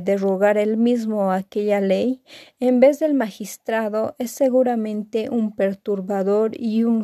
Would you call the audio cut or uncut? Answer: uncut